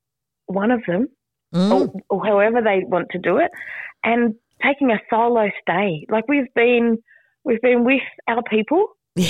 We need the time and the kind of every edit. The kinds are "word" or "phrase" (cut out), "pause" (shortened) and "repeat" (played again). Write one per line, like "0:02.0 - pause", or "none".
none